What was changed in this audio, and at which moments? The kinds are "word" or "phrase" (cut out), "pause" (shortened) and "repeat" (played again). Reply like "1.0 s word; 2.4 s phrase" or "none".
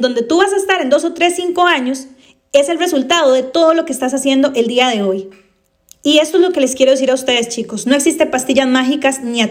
none